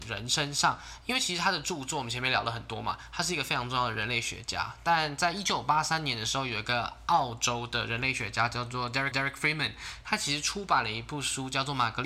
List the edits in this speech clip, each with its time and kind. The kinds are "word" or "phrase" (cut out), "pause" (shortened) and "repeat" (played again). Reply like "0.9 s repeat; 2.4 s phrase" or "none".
9.1 s repeat